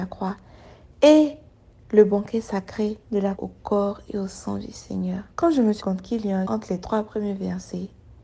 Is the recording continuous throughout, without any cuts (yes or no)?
no